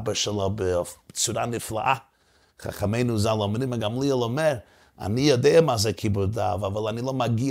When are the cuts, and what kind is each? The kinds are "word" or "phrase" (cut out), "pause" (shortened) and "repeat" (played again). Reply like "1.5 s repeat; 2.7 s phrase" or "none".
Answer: 3.7 s word